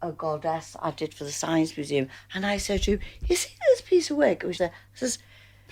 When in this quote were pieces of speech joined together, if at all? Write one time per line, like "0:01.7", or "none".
0:04.6